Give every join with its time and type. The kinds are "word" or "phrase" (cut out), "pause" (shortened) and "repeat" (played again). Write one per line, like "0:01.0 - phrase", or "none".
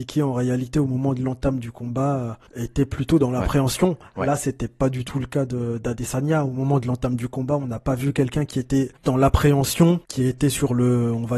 0:02.5 - pause
0:09.0 - pause
0:10.0 - pause